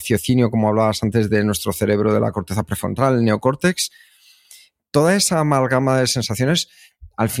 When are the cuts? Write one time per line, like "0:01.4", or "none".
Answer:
none